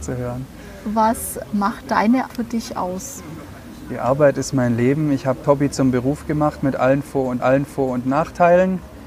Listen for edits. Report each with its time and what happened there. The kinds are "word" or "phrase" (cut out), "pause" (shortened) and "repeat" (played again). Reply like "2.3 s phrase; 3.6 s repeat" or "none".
1.4 s word; 2.3 s word; 5.4 s word; 7.4 s repeat